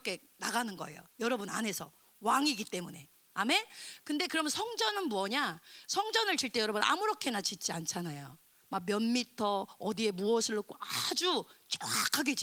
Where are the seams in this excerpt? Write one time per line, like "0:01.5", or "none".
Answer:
none